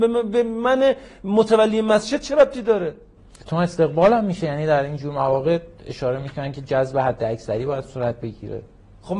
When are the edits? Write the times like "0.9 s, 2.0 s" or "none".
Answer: none